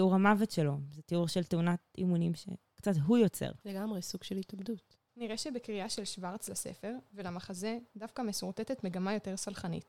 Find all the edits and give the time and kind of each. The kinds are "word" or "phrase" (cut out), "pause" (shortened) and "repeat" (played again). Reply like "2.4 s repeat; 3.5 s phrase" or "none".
3.6 s pause

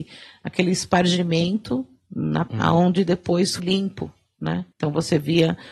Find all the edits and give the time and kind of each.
2.5 s word; 3.6 s word; 4.7 s pause

